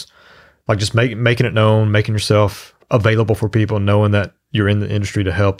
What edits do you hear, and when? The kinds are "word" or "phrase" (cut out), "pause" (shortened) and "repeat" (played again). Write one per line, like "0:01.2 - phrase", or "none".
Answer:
0:02.8 - pause